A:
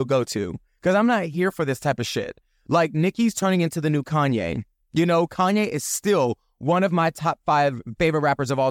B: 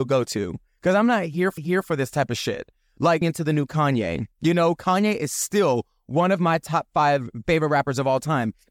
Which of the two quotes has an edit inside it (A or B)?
B